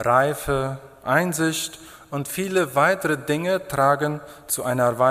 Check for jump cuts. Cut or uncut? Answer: uncut